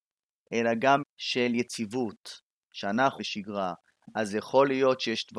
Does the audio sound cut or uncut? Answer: cut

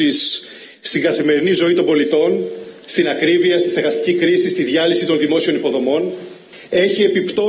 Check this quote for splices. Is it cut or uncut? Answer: uncut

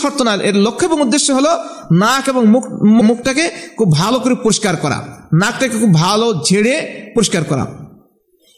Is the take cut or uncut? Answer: cut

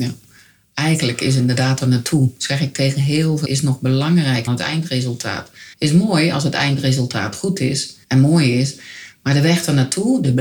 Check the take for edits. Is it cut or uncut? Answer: cut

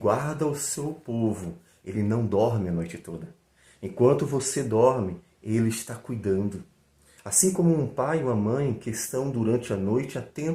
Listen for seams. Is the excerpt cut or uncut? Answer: uncut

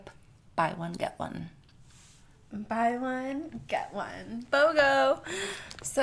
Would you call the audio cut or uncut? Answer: uncut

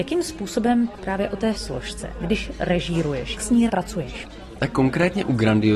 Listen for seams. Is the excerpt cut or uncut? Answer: cut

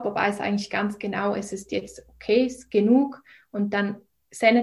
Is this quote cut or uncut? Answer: uncut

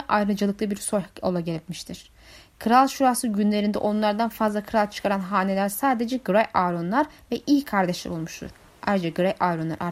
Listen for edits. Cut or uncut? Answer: uncut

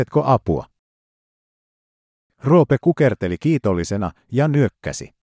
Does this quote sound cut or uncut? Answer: uncut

